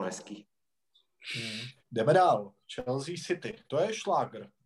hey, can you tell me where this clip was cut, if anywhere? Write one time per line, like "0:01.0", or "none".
0:01.8
0:02.6
0:03.7

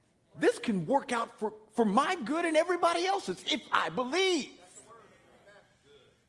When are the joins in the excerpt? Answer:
none

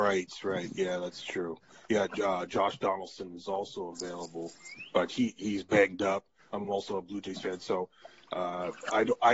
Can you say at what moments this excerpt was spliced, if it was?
none

